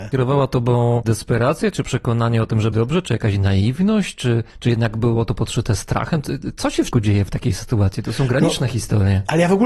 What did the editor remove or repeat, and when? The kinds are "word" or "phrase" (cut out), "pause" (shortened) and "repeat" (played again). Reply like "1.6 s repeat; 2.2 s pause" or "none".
2.7 s word; 4.5 s pause; 6.9 s word